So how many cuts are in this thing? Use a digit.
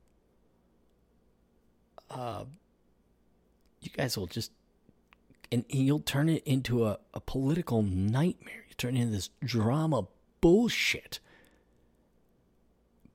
0